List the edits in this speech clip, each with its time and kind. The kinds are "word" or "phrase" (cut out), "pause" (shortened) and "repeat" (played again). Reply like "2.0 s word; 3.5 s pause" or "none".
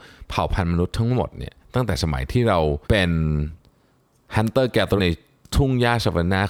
2.8 s pause; 5.0 s phrase